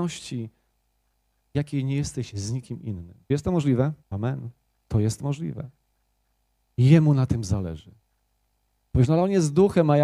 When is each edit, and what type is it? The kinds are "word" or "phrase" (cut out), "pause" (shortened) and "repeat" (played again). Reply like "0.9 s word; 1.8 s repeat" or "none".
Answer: 3.2 s pause; 4.0 s pause